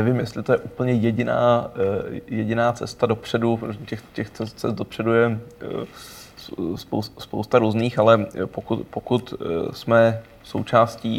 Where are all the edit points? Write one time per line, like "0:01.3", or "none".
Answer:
none